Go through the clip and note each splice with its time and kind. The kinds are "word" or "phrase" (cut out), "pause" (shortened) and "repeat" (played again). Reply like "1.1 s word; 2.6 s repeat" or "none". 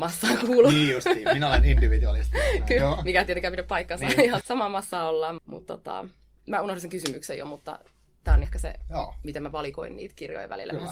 2.8 s word; 4.4 s word; 5.4 s word; 8.4 s word